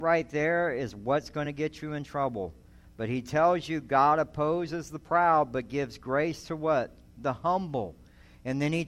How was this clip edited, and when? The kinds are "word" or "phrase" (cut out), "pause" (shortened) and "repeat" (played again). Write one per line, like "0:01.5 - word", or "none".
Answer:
none